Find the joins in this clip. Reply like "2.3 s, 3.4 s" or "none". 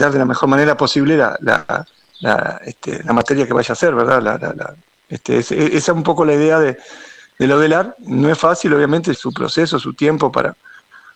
9.1 s